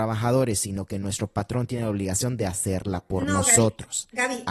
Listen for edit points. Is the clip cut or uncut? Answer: uncut